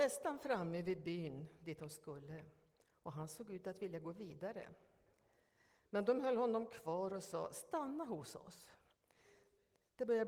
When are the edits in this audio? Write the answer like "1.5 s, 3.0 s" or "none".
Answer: none